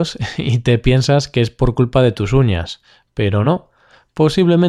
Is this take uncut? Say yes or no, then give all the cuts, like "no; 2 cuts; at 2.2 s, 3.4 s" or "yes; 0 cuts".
yes; 0 cuts